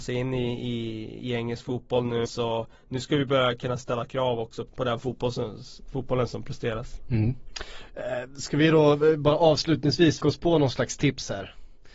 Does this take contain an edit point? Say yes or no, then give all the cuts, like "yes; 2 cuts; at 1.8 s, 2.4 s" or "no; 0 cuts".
yes; 3 cuts; at 2.3 s, 4.7 s, 10.2 s